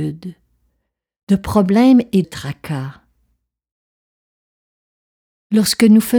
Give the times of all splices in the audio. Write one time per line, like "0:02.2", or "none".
0:02.2